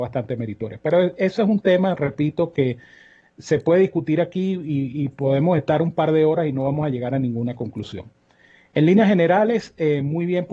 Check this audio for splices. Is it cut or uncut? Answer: uncut